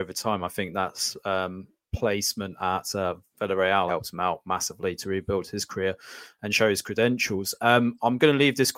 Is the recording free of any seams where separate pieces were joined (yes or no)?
no